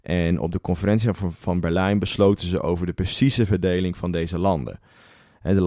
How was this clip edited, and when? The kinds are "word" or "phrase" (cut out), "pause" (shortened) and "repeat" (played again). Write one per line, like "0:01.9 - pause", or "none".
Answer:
none

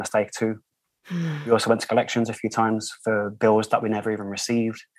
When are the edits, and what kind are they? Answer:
none

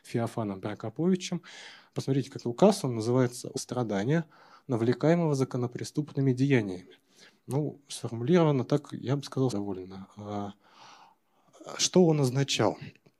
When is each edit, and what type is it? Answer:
0:02.4 - word
0:03.6 - phrase
0:09.5 - word

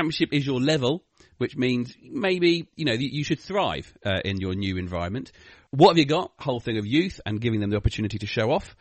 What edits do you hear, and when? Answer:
0:06.4 - phrase

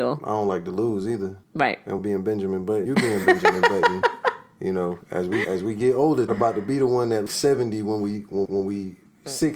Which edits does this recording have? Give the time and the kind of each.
0:01.4 - pause
0:02.0 - phrase
0:02.9 - word
0:05.0 - pause
0:05.4 - word
0:06.3 - phrase
0:07.3 - word
0:08.5 - repeat

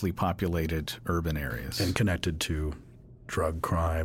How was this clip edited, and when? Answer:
none

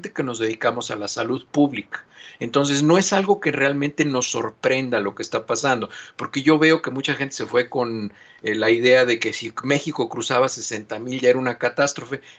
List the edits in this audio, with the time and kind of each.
none

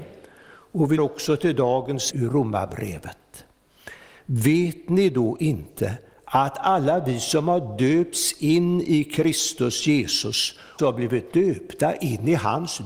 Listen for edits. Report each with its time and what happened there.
0:01.0 - word
0:02.1 - word
0:10.8 - word

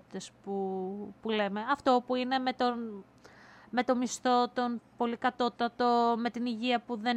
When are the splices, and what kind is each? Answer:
none

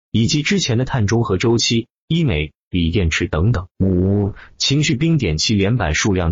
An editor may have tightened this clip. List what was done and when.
none

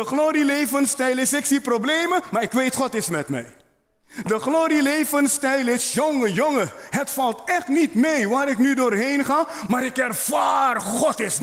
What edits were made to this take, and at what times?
none

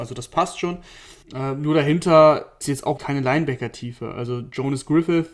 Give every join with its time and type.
0:01.2 - pause
0:02.6 - word
0:03.0 - word

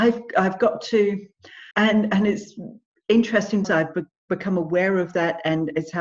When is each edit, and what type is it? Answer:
0:01.7 - pause
0:03.6 - word

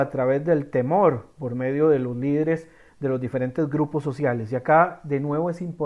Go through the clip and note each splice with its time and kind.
none

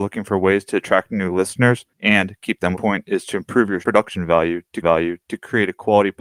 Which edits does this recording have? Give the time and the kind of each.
0:01.9 - pause
0:02.7 - phrase
0:03.8 - word
0:04.8 - repeat

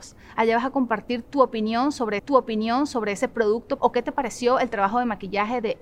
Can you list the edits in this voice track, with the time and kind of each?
0:02.2 - repeat
0:03.8 - word

